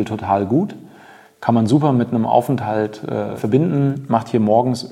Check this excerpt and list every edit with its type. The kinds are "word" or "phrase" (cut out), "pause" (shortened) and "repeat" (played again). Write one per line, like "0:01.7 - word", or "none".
none